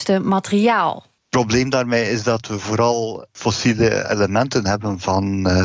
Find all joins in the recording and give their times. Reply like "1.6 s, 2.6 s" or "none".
1.2 s